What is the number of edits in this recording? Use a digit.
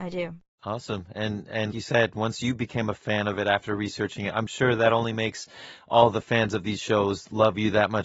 1